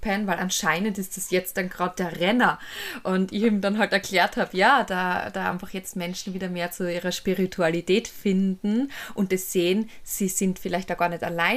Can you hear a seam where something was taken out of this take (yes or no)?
no